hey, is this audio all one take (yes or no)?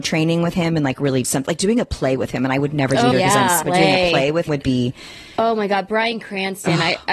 no